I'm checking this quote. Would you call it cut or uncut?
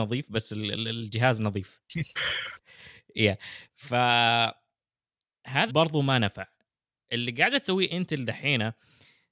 cut